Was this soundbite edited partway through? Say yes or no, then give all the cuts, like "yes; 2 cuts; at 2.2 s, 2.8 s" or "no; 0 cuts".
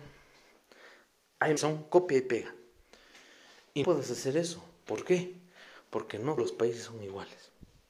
yes; 3 cuts; at 1.6 s, 3.8 s, 6.4 s